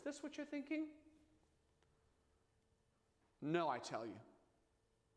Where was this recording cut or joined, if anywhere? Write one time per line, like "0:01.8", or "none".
none

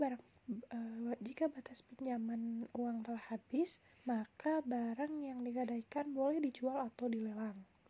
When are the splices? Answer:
0:03.9

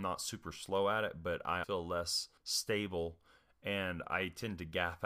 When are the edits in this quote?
0:01.6
0:02.4

